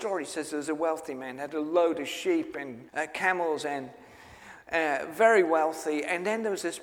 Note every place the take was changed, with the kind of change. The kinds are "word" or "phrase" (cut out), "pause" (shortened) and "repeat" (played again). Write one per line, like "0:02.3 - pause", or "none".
0:02.9 - pause